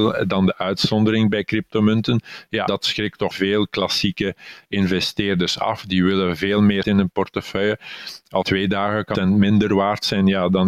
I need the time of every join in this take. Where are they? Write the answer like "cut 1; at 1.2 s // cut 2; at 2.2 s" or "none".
cut 1; at 2.7 s // cut 2; at 3.3 s // cut 3; at 6.8 s // cut 4; at 8.4 s // cut 5; at 9.1 s